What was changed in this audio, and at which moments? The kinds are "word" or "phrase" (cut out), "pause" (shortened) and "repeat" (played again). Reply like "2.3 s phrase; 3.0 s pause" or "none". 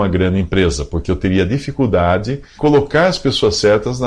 2.6 s word